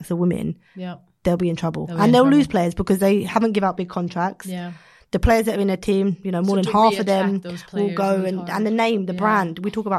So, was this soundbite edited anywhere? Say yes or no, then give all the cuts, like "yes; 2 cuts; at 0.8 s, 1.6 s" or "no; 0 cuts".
no; 0 cuts